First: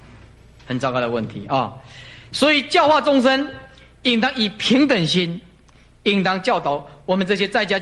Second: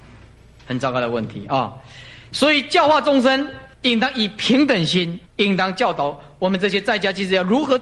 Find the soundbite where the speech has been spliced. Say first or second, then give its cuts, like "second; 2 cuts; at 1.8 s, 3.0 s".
second; 2 cuts; at 3.7 s, 5.3 s